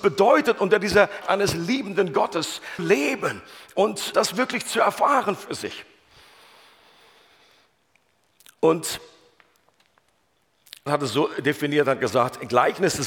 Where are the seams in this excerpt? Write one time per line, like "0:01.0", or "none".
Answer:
0:01.2
0:02.8
0:04.1
0:10.9